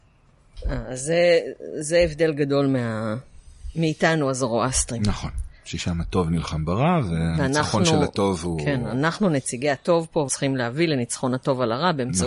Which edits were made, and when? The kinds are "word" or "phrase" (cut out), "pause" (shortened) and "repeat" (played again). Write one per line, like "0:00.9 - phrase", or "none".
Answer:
0:10.3 - word